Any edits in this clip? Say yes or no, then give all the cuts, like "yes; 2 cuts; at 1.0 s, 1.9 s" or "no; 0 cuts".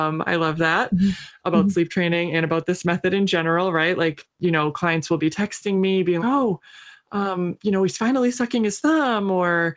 yes; 1 cut; at 6.2 s